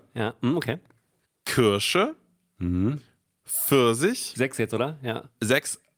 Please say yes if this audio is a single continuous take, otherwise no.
yes